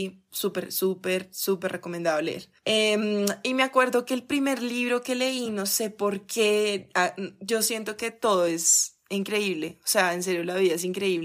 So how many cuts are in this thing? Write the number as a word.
zero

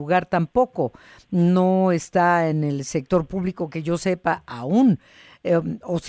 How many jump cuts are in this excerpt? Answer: zero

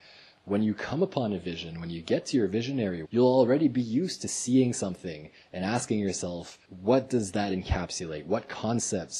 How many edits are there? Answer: one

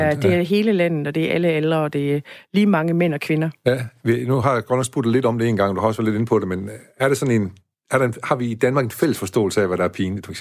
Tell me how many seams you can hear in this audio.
zero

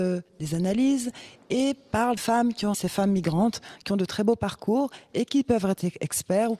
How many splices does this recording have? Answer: two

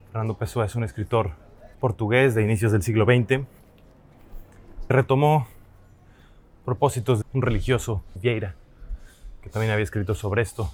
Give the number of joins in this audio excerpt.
four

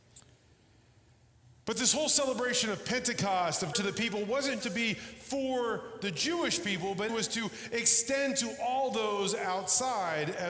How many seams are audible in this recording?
three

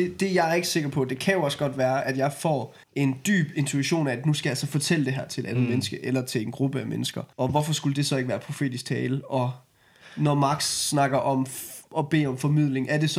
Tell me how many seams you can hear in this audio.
two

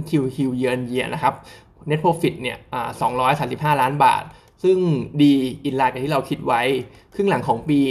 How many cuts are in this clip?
zero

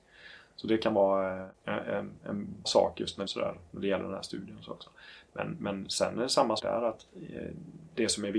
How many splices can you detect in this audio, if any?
four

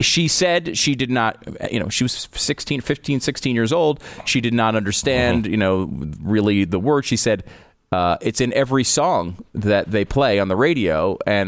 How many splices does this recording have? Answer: zero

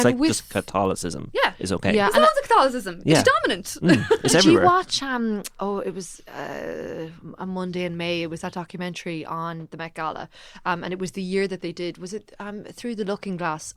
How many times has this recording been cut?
zero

